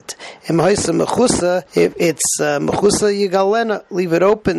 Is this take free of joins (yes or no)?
no